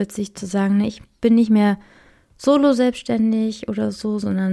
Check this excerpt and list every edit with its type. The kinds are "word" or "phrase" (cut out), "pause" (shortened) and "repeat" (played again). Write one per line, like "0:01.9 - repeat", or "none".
none